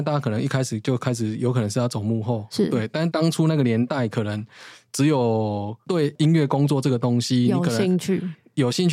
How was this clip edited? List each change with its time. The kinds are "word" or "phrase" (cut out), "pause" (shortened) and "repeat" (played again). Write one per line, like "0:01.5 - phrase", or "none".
none